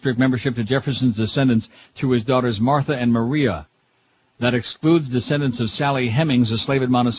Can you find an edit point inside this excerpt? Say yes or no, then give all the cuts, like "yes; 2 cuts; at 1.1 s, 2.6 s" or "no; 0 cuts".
no; 0 cuts